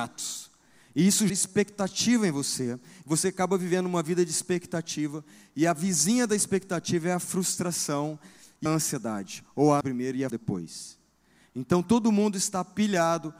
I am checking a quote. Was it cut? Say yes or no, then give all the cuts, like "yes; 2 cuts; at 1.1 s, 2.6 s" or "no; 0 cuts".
yes; 4 cuts; at 1.3 s, 8.7 s, 9.8 s, 10.3 s